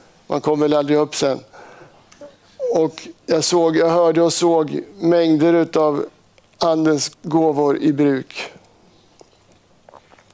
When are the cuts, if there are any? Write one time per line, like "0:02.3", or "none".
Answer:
0:03.2
0:07.1